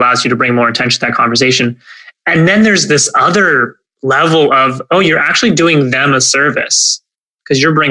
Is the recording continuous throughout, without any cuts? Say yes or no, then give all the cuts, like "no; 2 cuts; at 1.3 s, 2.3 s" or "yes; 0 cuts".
yes; 0 cuts